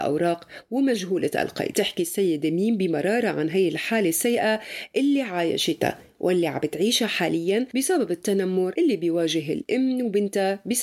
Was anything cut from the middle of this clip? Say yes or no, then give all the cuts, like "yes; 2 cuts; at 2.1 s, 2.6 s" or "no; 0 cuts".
no; 0 cuts